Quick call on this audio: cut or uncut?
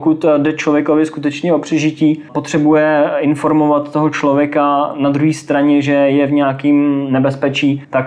uncut